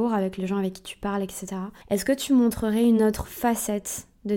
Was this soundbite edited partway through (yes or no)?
no